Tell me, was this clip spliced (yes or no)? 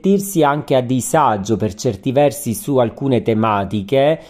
no